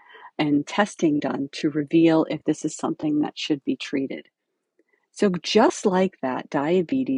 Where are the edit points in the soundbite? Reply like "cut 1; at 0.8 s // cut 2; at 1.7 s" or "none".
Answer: none